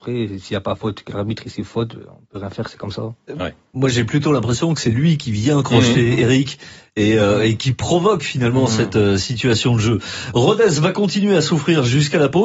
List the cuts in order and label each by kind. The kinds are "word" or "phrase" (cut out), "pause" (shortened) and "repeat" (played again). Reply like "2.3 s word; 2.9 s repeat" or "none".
none